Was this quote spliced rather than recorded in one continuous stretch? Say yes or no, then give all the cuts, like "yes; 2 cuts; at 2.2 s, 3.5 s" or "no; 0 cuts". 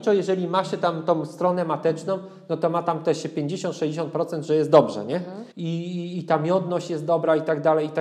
yes; 1 cut; at 5.5 s